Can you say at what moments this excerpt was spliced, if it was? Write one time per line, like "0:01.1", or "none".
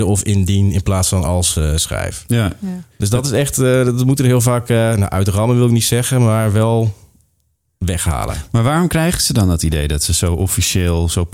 none